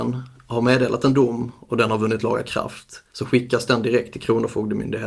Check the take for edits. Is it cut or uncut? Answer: cut